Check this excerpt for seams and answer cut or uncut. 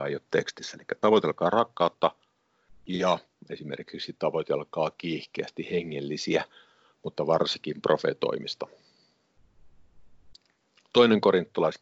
uncut